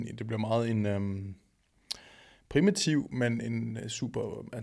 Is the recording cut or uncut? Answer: uncut